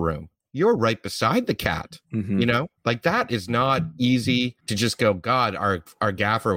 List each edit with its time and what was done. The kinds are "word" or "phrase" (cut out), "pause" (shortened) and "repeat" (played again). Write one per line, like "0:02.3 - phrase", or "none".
0:02.0 - pause
0:02.8 - pause
0:04.6 - pause